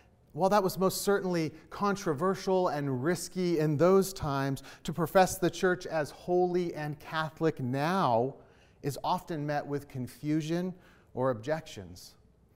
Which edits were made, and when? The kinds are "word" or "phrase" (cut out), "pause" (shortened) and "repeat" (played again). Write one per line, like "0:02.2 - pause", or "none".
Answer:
none

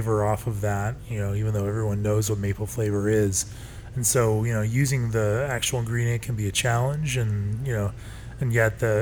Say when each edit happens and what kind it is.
none

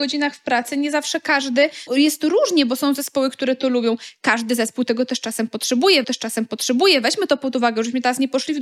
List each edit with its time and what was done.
0:01.9 - word
0:06.0 - repeat

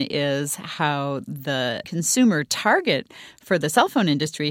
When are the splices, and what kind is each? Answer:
none

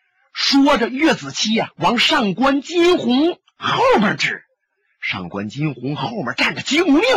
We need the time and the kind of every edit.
0:01.7 - word

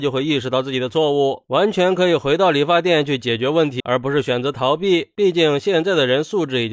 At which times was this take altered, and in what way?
0:03.8 - word

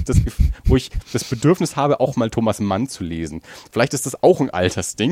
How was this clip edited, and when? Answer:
none

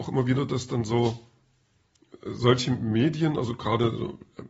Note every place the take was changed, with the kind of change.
none

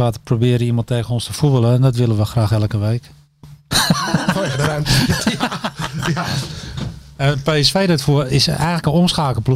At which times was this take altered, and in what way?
0:08.3 - word

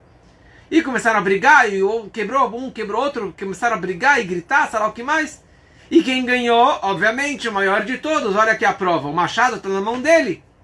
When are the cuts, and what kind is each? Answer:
none

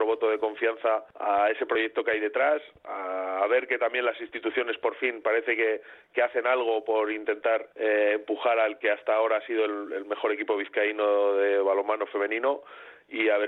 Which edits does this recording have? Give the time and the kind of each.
0:01.1 - pause
0:07.7 - pause

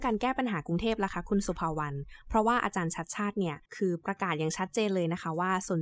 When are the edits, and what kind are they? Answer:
0:03.6 - pause

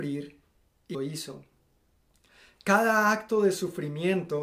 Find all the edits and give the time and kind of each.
0:00.9 - word

